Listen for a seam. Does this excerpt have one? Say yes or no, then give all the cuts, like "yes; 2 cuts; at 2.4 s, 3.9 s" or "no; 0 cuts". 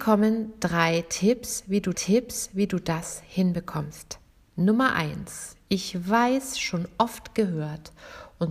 yes; 1 cut; at 1.9 s